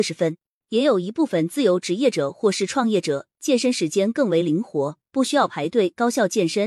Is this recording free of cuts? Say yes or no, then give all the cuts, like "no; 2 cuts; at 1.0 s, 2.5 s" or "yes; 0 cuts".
no; 1 cut; at 3.3 s